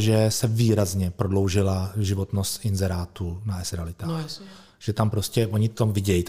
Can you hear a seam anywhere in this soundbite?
no; 0 cuts

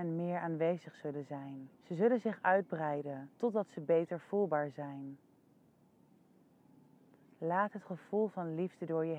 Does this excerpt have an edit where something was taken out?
yes; 2 cuts; at 1.7 s, 3.4 s

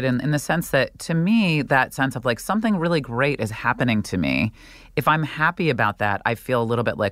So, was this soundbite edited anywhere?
no; 0 cuts

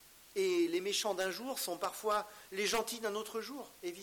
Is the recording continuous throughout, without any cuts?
yes; 0 cuts

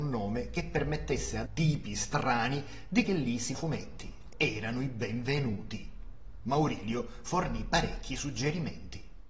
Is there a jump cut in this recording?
yes; 4 cuts; at 1.5 s, 3.0 s, 3.5 s, 4.3 s

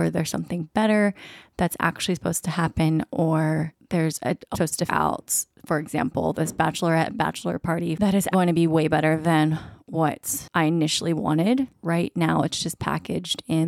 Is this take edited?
yes; 3 cuts; at 4.5 s, 4.9 s, 8.3 s

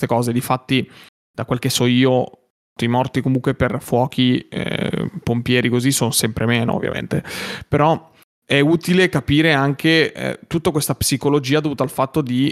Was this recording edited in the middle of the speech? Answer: no; 0 cuts

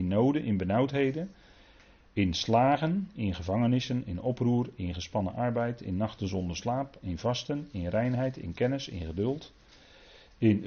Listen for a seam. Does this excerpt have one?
no; 0 cuts

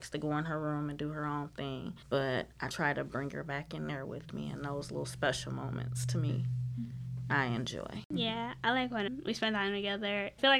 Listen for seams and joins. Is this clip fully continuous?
yes; 0 cuts

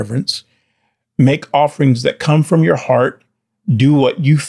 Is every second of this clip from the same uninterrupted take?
yes; 0 cuts

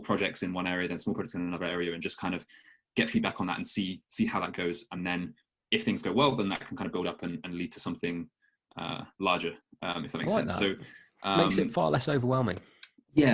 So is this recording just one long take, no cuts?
yes; 0 cuts

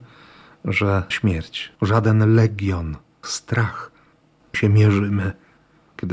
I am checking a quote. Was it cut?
yes; 4 cuts; at 1.1 s, 1.8 s, 3.2 s, 4.5 s

